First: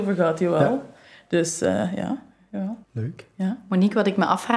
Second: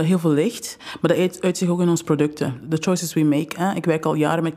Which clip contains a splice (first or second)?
first